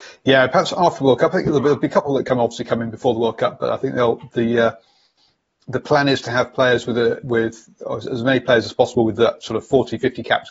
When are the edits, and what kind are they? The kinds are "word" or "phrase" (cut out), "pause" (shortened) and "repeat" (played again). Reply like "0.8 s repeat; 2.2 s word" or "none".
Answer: none